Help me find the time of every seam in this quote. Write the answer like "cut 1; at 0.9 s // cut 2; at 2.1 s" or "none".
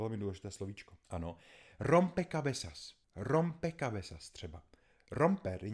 cut 1; at 1.0 s // cut 2; at 3.0 s